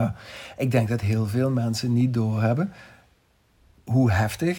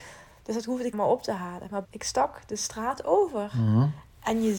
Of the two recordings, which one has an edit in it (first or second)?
second